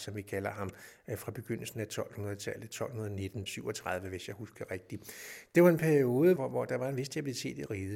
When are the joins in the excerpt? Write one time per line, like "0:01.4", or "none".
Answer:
0:03.5
0:06.4